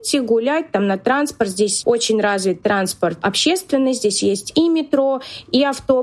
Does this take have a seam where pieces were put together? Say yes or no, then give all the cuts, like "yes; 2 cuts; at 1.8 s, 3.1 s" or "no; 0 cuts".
no; 0 cuts